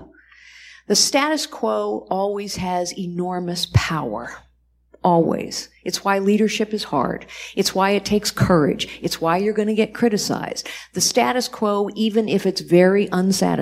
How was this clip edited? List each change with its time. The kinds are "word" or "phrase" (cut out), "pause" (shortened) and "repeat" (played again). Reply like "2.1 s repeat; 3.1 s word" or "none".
none